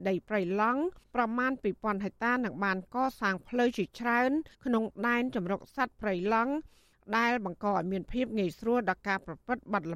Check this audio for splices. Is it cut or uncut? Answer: cut